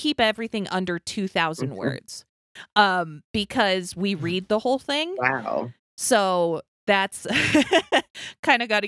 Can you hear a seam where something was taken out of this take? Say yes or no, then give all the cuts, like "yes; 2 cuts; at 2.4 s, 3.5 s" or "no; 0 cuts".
no; 0 cuts